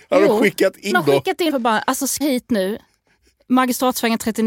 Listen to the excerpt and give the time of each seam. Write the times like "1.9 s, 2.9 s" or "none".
0.9 s, 1.5 s, 2.2 s